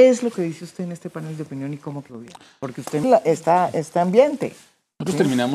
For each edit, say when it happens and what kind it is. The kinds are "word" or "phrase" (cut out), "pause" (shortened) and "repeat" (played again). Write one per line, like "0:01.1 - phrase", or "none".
0:02.1 - word
0:03.0 - word